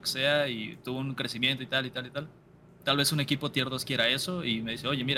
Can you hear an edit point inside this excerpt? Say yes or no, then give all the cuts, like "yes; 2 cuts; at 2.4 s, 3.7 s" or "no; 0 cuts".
no; 0 cuts